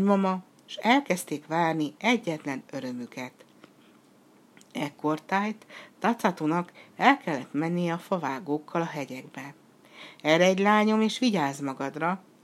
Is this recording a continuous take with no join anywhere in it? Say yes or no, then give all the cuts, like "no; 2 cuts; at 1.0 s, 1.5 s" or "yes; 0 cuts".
yes; 0 cuts